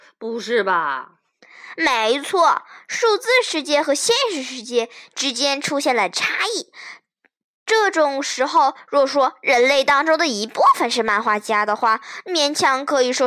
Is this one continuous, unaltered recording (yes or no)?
yes